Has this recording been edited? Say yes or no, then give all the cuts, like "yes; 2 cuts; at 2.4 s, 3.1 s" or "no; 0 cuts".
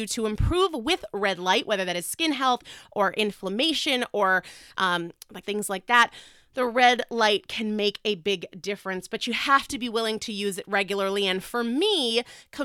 yes; 1 cut; at 5.4 s